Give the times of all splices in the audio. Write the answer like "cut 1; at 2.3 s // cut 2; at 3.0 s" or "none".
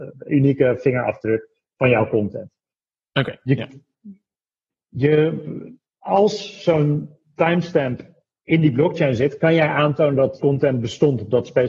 cut 1; at 10.4 s